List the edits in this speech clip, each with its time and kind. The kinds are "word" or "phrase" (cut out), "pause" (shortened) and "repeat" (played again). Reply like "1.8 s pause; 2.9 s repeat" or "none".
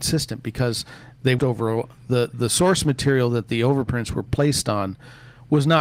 1.4 s phrase